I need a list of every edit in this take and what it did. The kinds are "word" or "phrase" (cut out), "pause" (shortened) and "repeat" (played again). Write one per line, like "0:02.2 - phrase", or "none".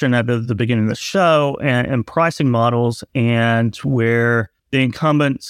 0:04.6 - pause